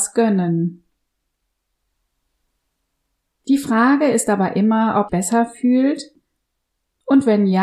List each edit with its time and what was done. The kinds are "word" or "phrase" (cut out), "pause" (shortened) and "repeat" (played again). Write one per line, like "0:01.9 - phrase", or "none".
0:05.1 - phrase